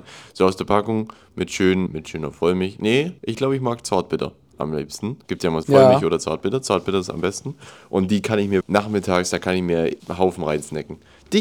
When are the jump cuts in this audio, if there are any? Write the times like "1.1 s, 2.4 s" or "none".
1.9 s, 3.2 s, 5.2 s, 5.6 s, 8.6 s, 10.0 s